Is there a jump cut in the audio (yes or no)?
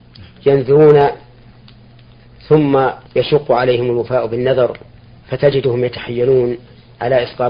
yes